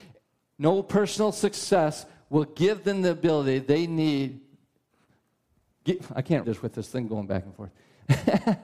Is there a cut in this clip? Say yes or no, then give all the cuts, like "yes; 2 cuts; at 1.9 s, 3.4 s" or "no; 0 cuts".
yes; 1 cut; at 6.4 s